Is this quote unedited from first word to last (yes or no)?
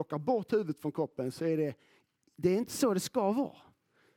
yes